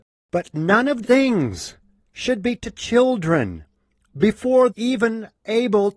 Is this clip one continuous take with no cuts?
no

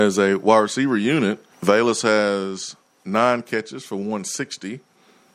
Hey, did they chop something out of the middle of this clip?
yes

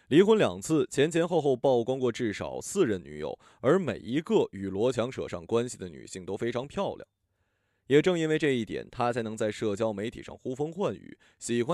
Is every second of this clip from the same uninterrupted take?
yes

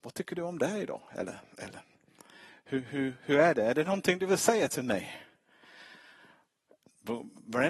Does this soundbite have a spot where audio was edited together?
no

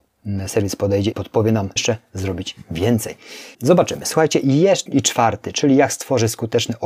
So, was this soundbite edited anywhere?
yes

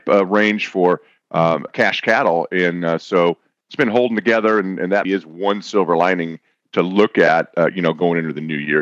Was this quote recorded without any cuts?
no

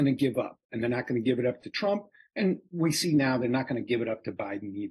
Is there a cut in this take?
no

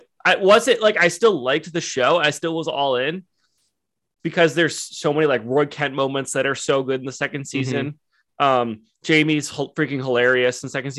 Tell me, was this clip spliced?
no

